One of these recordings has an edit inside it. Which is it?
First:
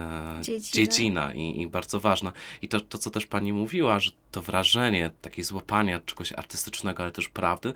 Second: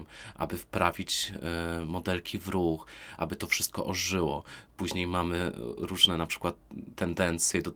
first; 1 cut; at 4.2 s

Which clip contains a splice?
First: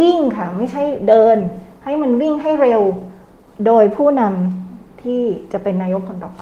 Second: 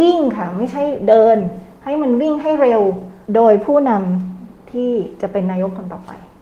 second; 1 cut; at 3.2 s

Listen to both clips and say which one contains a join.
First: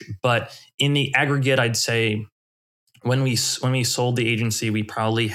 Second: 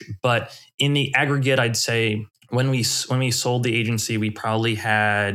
second; 1 cut; at 2.3 s

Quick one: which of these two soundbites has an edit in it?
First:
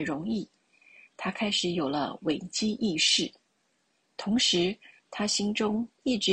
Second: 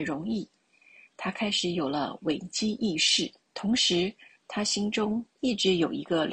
second; 1 cut; at 3.4 s

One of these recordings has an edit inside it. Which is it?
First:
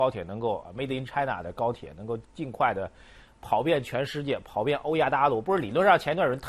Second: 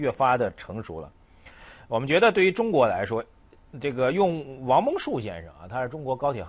first; 1 cut; at 2.2 s

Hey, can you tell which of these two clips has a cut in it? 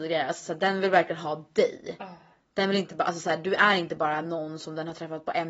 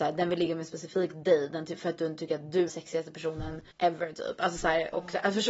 second; 2 cuts; at 2.7 s, 3.7 s

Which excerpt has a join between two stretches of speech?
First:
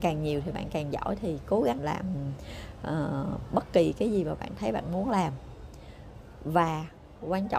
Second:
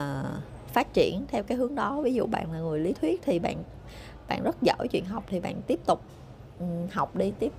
first; 1 cut; at 1.8 s

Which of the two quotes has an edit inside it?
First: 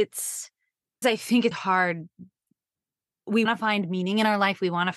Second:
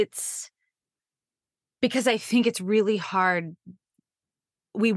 first; 3 cuts; at 1.0 s, 1.5 s, 3.5 s

